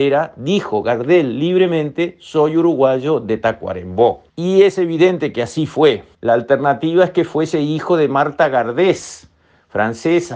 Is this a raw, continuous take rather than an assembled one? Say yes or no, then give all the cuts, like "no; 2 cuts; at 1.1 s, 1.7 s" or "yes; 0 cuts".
no; 2 cuts; at 4.3 s, 6.1 s